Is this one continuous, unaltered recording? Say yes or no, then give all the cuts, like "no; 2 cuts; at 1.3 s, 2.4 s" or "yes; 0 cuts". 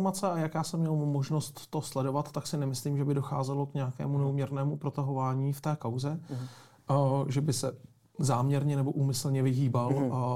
yes; 0 cuts